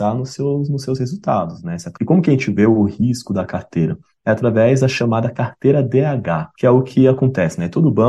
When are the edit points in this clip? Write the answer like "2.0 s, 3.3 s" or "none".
none